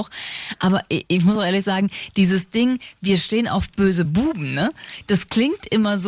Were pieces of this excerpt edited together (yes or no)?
no